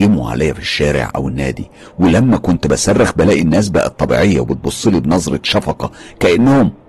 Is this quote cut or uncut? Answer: uncut